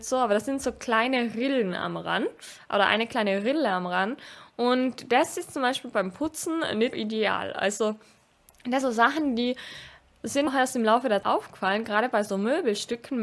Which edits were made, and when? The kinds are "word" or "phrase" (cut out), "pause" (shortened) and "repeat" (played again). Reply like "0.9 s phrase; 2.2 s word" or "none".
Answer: 6.9 s word; 8.8 s word; 10.5 s word; 11.2 s word

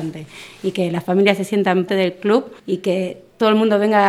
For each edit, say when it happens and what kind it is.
1.9 s word; 2.6 s pause

